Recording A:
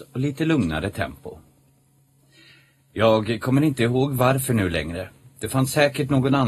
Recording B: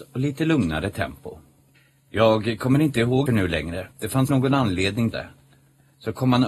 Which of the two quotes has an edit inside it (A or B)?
B